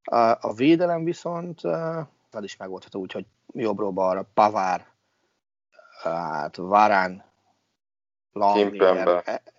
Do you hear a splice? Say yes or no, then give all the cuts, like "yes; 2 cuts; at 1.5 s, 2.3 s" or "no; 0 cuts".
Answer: yes; 1 cut; at 2.3 s